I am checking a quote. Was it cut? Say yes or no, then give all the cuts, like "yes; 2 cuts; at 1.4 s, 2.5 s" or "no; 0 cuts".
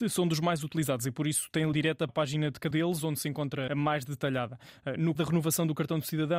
yes; 5 cuts; at 1.7 s, 2.1 s, 2.7 s, 3.7 s, 5.2 s